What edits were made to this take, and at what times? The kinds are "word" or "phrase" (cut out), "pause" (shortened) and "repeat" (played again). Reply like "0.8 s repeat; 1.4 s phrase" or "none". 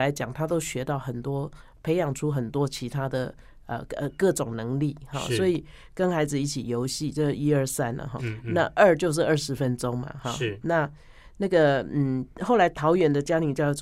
8.2 s word